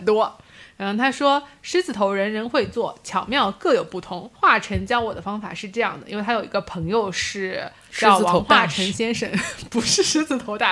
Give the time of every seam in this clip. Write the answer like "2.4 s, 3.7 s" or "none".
4.4 s